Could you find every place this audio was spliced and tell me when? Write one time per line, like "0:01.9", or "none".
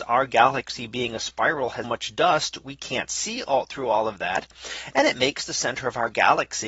0:01.8